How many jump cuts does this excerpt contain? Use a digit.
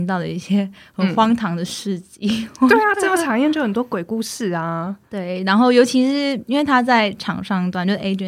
0